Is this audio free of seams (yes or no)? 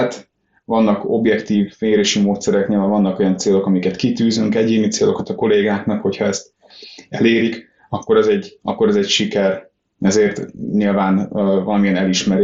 yes